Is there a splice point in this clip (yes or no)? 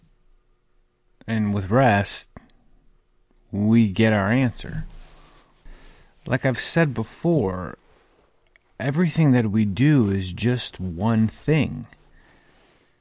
no